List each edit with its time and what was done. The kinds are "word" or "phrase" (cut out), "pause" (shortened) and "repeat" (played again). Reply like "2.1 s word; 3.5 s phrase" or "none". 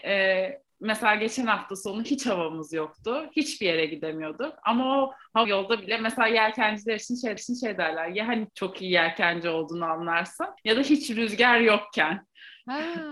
5.4 s word; 7.4 s repeat; 8.5 s phrase; 10.6 s pause